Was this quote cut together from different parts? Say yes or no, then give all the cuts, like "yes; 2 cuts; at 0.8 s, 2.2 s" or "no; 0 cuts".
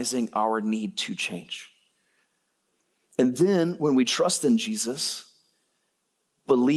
no; 0 cuts